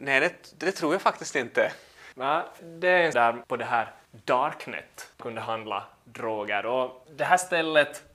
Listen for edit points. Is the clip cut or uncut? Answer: cut